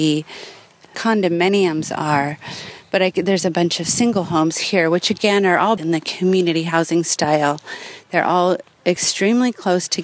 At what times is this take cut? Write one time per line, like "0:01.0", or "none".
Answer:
0:05.8